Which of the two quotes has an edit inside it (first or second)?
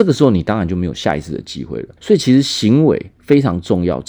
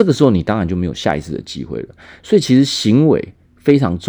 first